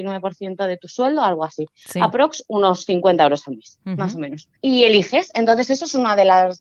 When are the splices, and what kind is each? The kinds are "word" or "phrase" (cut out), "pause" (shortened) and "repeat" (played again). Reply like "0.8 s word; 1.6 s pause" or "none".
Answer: 4.6 s pause